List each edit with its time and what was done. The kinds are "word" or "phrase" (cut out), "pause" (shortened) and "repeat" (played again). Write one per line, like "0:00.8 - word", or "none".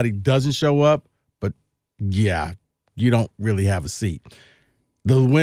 none